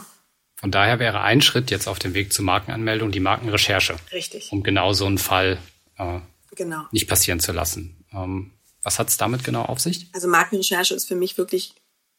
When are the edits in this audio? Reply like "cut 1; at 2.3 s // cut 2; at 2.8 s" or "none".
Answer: none